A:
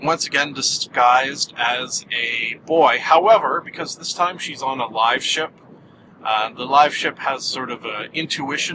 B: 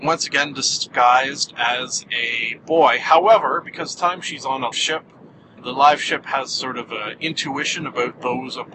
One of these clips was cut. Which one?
B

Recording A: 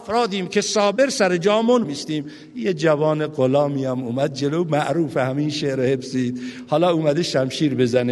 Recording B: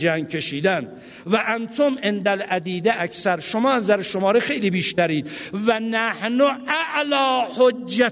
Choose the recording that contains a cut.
A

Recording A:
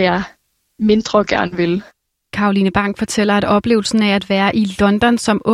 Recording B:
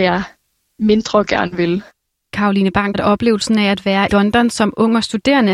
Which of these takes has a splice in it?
B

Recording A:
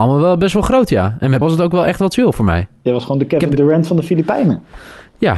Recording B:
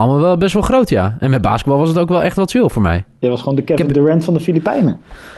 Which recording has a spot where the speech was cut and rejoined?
A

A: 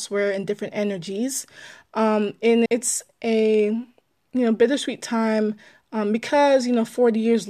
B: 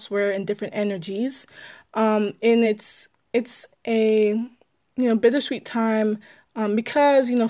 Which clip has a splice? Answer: A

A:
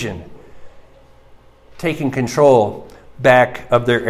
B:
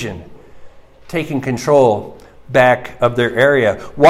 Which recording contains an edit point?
B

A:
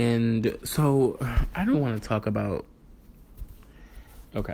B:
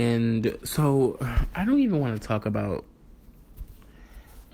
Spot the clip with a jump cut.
A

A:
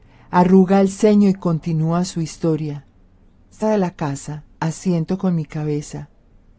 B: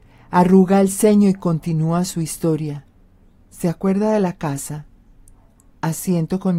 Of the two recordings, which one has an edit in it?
A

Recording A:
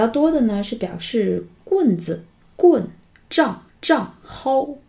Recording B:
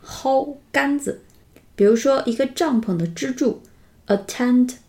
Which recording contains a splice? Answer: A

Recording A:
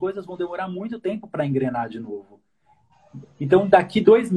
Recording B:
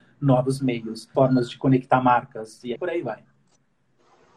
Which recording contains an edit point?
B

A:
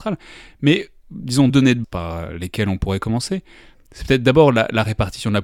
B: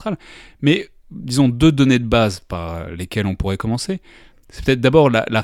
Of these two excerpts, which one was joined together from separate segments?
A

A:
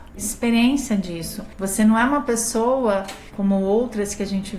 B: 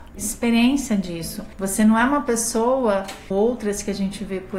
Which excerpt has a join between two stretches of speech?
B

